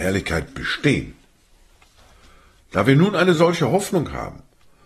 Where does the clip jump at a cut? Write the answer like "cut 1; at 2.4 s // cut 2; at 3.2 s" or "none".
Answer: none